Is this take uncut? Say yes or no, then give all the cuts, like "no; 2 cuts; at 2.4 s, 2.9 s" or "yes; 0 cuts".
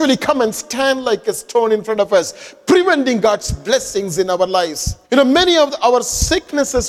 no; 1 cut; at 5.0 s